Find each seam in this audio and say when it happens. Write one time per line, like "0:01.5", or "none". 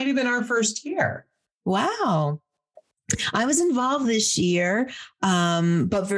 none